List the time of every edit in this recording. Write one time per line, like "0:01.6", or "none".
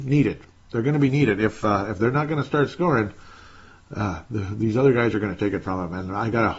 none